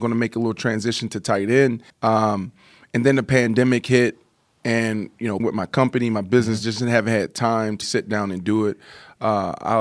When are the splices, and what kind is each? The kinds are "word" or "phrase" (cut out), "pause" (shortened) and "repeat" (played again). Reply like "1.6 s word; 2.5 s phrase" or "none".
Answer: 1.9 s pause; 5.4 s word; 7.8 s word